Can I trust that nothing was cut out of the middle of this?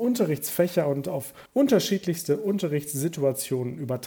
no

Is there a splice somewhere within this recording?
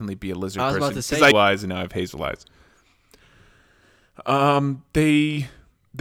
yes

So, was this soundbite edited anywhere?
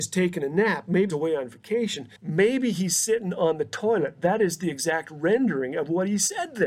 yes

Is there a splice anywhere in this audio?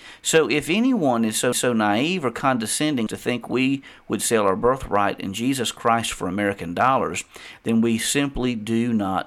yes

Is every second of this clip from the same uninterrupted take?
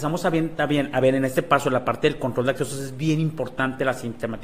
yes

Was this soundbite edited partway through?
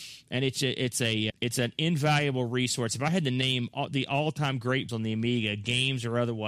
yes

